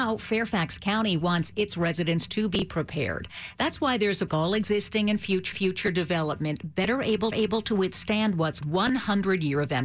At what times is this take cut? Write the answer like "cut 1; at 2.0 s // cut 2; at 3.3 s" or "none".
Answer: cut 1; at 4.3 s // cut 2; at 5.5 s // cut 3; at 7.3 s // cut 4; at 8.6 s